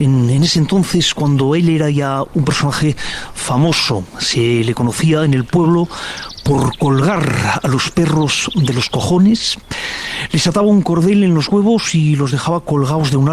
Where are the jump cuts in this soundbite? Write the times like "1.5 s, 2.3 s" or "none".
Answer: none